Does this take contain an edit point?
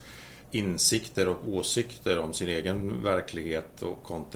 no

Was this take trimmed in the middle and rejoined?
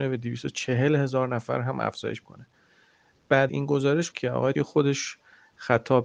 yes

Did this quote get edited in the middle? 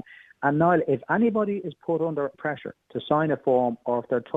yes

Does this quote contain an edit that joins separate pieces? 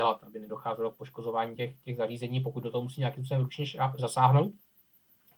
no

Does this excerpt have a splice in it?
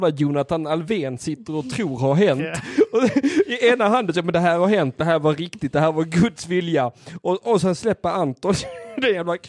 no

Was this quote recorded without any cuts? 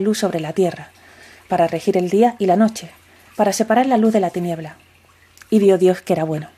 yes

